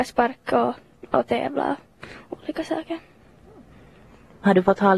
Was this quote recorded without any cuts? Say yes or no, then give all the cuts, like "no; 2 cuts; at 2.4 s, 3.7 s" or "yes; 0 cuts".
yes; 0 cuts